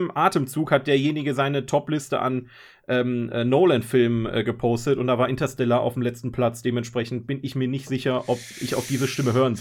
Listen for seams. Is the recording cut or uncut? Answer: uncut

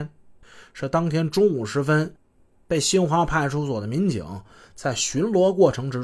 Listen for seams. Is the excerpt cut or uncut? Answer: uncut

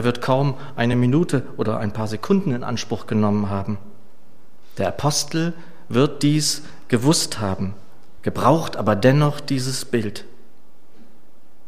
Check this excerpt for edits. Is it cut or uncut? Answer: uncut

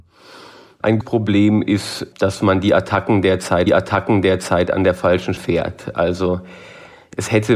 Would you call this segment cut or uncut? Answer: cut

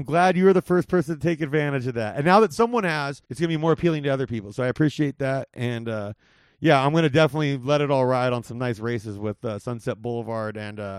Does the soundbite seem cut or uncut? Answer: cut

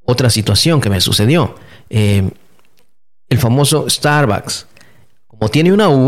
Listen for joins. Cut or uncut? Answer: uncut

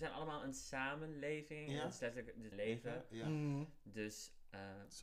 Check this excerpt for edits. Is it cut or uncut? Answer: cut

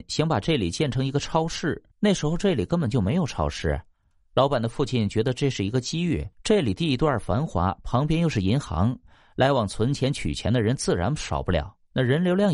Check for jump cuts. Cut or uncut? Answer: cut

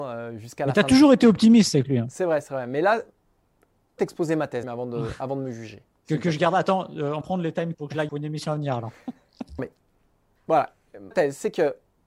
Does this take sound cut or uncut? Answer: cut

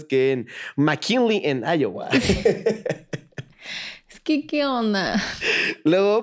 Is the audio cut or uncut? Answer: uncut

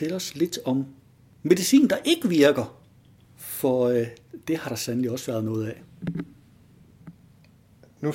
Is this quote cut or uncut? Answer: uncut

